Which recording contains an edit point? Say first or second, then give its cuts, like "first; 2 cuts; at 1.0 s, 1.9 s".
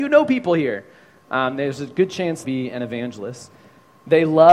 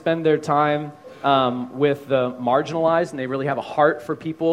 first; 1 cut; at 2.4 s